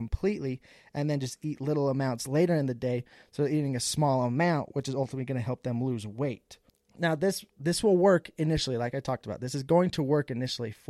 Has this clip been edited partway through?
no; 0 cuts

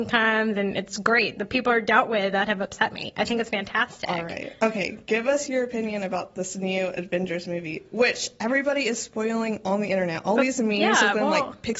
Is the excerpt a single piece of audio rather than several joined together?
yes; 0 cuts

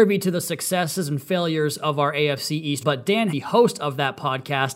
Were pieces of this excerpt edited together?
yes; 2 cuts; at 2.8 s, 3.3 s

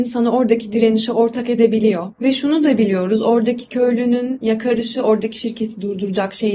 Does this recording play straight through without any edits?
no; 1 cut; at 2.1 s

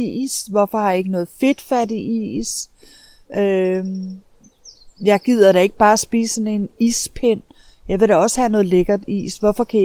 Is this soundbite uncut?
yes; 0 cuts

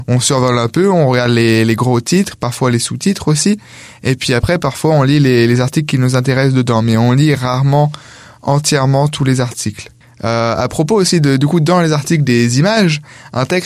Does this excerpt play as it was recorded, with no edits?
yes; 0 cuts

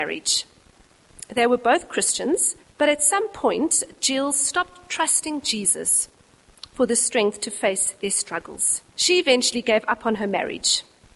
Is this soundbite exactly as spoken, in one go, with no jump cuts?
no; 2 cuts; at 2.6 s, 8.9 s

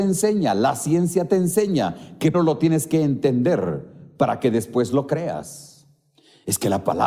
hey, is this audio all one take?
no; 1 cut; at 2.3 s

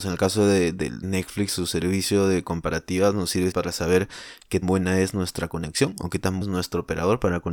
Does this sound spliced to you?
yes; 4 cuts; at 1.0 s, 3.5 s, 4.6 s, 6.4 s

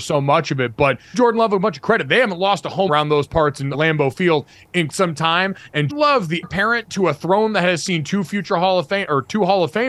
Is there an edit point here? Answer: yes; 6 cuts; at 1.1 s, 2.9 s, 3.7 s, 4.9 s, 5.9 s, 6.4 s

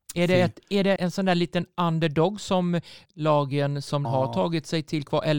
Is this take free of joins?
no; 3 cuts; at 1.0 s, 3.1 s, 4.0 s

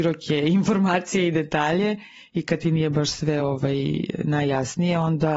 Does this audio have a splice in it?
no; 0 cuts

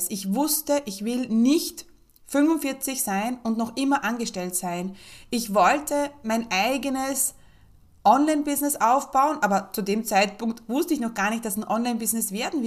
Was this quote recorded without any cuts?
yes; 0 cuts

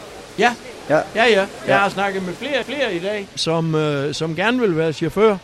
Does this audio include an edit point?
yes; 2 cuts; at 2.6 s, 3.4 s

